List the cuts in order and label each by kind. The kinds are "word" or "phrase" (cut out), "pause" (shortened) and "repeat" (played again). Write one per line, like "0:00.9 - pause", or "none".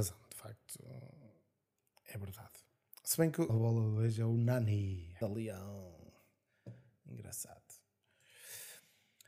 0:03.5 - word
0:05.2 - word